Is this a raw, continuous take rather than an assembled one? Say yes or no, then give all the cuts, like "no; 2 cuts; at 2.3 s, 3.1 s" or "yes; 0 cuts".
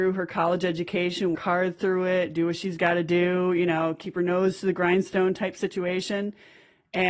no; 1 cut; at 1.4 s